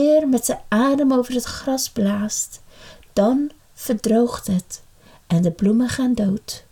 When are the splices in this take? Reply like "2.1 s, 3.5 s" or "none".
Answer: none